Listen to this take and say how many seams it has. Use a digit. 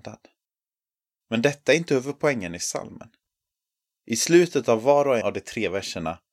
1